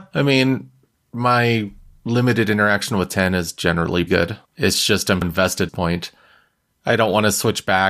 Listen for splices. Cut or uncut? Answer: cut